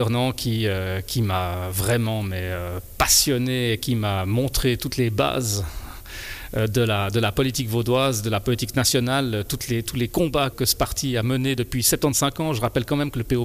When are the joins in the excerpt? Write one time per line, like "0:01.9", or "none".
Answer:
0:10.5